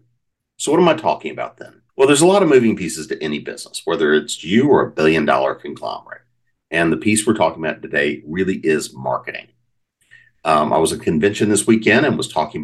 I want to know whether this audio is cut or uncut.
cut